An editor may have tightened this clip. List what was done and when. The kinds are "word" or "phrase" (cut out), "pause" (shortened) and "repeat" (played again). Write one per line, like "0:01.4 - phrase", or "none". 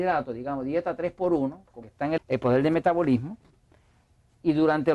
0:01.8 - word
0:02.2 - word

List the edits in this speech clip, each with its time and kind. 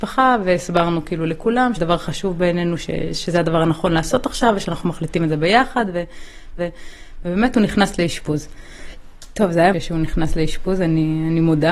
0:01.8 - word
0:06.6 - repeat
0:09.7 - phrase

